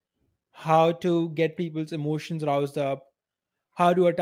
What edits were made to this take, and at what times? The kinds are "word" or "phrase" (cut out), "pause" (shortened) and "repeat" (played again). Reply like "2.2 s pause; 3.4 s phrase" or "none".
none